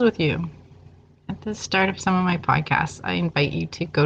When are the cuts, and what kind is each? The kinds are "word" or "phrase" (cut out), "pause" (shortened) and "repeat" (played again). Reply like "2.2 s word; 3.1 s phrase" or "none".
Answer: none